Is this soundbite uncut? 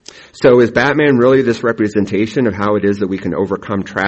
yes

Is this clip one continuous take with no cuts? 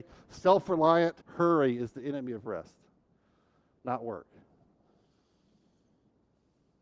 no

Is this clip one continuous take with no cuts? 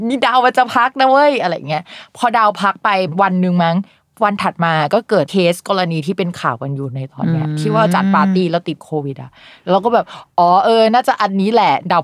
yes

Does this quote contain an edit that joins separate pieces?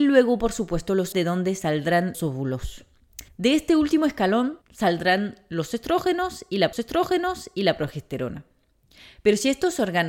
yes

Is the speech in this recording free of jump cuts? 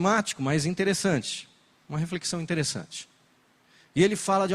yes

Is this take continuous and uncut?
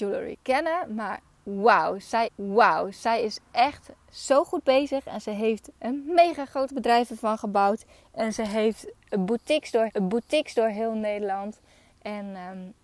no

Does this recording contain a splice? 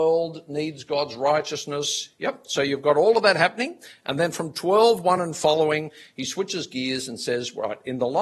no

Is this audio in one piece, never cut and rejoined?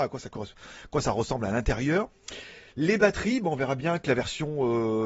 yes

